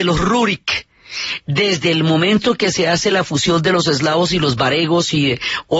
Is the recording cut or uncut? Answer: uncut